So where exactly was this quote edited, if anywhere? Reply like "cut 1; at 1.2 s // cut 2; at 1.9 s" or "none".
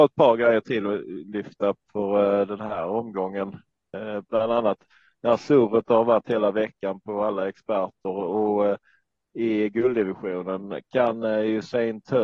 none